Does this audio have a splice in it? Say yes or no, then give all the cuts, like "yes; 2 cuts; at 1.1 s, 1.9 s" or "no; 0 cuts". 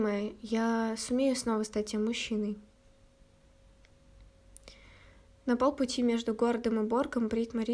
no; 0 cuts